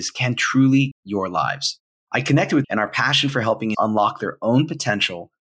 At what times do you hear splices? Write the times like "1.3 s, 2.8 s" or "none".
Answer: 0.9 s, 1.9 s, 2.6 s, 3.7 s